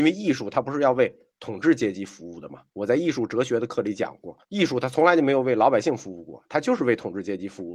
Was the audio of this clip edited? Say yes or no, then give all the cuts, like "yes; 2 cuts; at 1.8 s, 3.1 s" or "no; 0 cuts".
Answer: yes; 2 cuts; at 2.7 s, 4.4 s